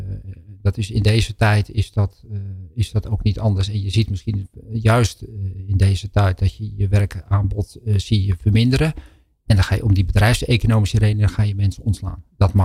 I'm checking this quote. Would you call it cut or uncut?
uncut